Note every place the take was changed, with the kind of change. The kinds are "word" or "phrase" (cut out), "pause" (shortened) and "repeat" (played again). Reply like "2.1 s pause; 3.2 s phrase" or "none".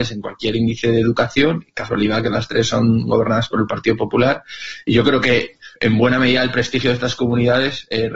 5.8 s pause